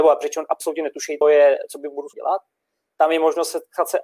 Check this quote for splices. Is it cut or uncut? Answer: cut